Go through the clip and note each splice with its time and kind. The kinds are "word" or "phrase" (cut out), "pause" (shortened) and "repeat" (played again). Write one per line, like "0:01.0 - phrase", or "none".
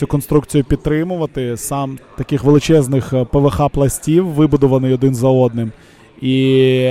0:02.0 - phrase